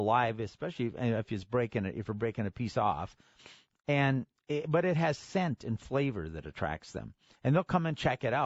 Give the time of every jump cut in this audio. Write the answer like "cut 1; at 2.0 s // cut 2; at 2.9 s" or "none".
none